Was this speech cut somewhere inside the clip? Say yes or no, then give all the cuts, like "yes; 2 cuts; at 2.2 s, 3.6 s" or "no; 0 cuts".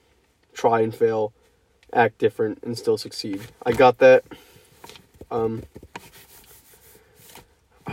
no; 0 cuts